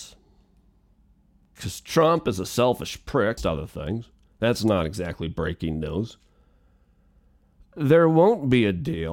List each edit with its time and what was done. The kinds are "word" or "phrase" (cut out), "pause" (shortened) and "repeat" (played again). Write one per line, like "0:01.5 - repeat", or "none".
0:03.4 - word